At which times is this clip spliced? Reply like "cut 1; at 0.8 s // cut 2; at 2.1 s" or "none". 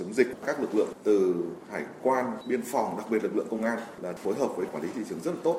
none